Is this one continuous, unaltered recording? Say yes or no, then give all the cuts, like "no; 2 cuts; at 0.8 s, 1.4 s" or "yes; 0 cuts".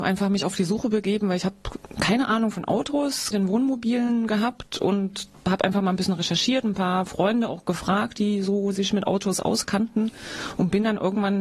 no; 1 cut; at 3.3 s